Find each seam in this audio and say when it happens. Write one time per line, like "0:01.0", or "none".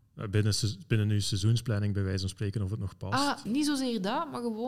0:03.5